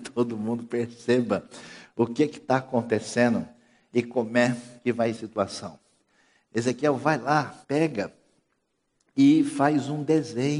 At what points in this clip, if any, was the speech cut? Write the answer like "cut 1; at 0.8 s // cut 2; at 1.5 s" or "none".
cut 1; at 5.2 s // cut 2; at 7.6 s